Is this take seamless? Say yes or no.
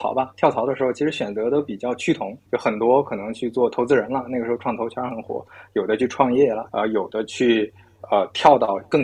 no